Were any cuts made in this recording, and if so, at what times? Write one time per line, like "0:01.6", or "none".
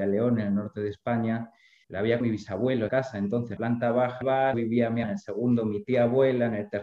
0:01.8
0:02.2
0:02.9
0:03.6
0:04.2
0:04.5
0:05.0